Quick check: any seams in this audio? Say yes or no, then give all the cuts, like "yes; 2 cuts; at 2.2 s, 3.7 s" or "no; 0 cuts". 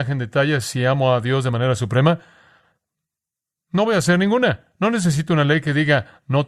no; 0 cuts